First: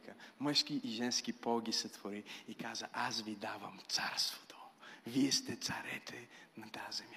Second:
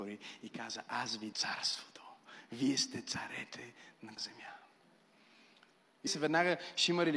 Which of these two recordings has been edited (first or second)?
second